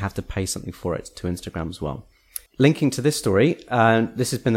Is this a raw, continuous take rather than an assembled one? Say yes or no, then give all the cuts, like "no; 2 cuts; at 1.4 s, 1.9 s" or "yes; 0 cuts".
no; 1 cut; at 2.5 s